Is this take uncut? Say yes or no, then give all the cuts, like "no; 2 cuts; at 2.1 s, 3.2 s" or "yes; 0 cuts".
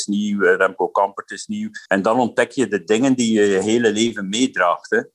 no; 1 cut; at 1.9 s